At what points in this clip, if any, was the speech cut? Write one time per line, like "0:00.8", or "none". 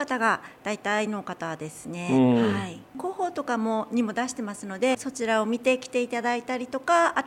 0:04.9